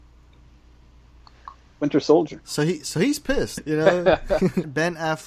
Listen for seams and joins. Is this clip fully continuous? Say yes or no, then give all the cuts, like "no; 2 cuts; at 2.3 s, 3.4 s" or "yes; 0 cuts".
yes; 0 cuts